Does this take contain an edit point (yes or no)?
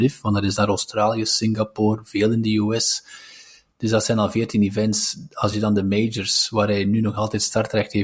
no